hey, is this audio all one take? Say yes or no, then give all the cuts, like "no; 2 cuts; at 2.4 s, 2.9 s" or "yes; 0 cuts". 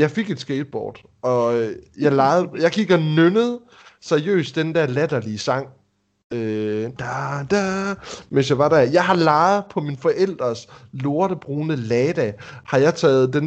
no; 1 cut; at 7.0 s